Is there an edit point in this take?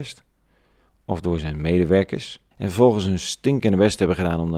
yes; 1 cut; at 2.5 s

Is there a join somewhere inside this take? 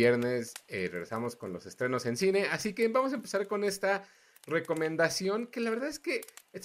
no; 0 cuts

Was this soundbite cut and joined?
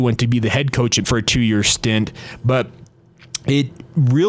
yes; 1 cut; at 1.0 s

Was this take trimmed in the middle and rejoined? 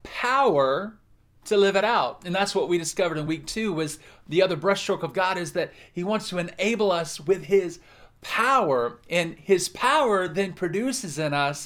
no; 0 cuts

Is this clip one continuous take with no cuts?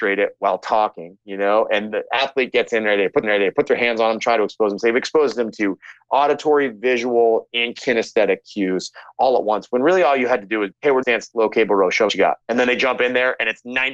no; 7 cuts; at 1.2 s, 1.9 s, 3.2 s, 10.7 s, 11.0 s, 12.1 s, 12.4 s

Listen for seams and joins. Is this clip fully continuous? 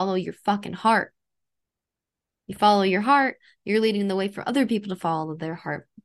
yes; 0 cuts

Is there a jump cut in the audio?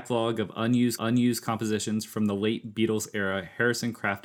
yes; 1 cut; at 1.0 s

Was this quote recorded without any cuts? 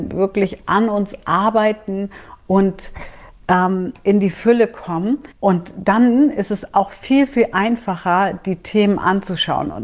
no; 1 cut; at 5.3 s

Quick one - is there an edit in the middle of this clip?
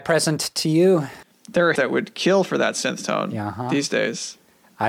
yes; 2 cuts; at 1.2 s, 1.8 s

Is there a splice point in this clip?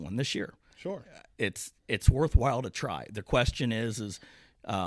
yes; 1 cut; at 1.8 s

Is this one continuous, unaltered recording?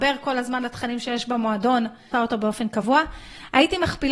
no; 1 cut; at 2.1 s

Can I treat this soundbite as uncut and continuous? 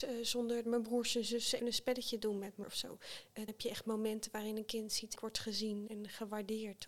no; 5 cuts; at 1.6 s, 2.6 s, 3.5 s, 5.1 s, 5.9 s

